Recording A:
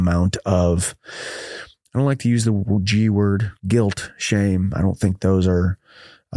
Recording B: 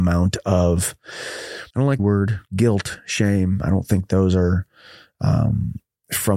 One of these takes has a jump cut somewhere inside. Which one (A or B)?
B